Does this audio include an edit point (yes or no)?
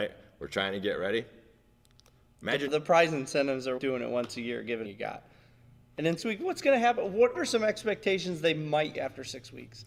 yes